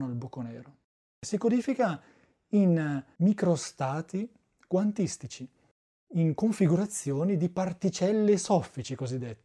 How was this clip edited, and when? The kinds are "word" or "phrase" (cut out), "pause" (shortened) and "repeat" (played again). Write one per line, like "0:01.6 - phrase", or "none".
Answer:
none